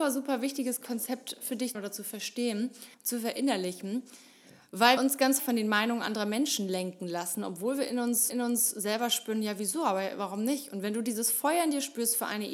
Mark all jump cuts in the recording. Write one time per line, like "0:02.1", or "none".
0:01.7
0:02.9
0:05.0
0:05.4
0:08.3